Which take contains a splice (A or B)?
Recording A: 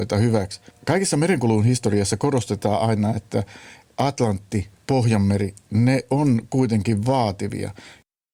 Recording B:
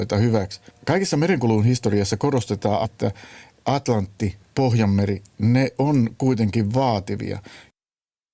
B